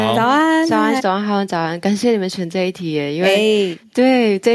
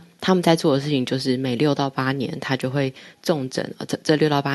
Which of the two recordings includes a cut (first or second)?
first